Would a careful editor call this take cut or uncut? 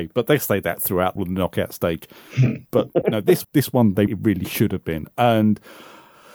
cut